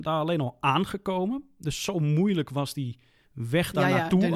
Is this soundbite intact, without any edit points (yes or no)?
yes